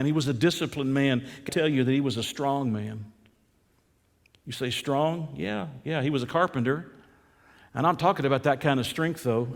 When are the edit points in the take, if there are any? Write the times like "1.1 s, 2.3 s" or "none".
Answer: 1.5 s